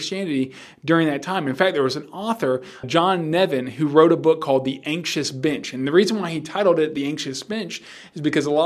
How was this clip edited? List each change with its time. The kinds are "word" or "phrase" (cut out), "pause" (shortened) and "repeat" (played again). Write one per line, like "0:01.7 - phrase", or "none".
0:02.8 - word